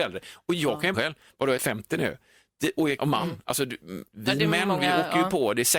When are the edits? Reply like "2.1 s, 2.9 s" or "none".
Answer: 0.9 s, 1.6 s, 3.0 s, 4.1 s